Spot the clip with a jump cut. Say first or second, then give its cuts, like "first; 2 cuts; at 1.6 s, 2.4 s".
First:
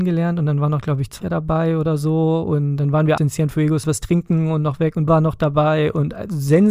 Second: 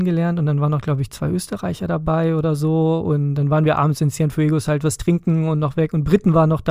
first; 4 cuts; at 1.2 s, 3.2 s, 3.8 s, 5.1 s